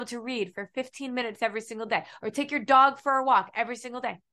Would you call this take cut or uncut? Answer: uncut